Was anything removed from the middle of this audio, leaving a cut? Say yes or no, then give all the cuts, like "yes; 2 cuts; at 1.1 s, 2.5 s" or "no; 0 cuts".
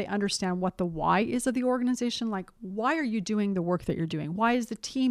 no; 0 cuts